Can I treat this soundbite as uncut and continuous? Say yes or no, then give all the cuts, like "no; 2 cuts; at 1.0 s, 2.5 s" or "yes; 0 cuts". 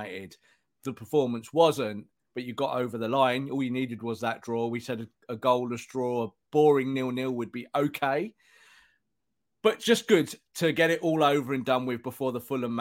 yes; 0 cuts